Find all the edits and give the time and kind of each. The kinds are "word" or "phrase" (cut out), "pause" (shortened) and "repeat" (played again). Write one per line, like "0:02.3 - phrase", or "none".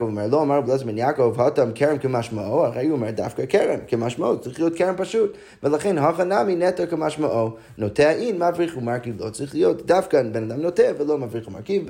none